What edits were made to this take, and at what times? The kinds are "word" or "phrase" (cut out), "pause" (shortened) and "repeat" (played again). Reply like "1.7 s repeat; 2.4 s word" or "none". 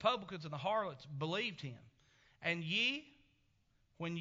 none